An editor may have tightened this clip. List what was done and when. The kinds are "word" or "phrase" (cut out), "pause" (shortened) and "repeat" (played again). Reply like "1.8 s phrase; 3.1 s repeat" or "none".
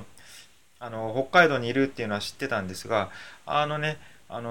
none